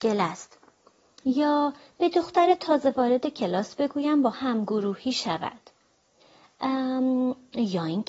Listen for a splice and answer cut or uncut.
cut